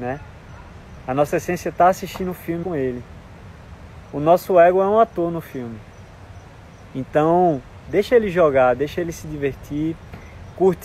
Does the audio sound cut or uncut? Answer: cut